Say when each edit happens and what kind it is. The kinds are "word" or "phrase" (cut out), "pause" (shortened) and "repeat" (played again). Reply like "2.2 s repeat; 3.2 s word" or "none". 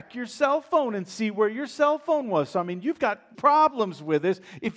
3.3 s word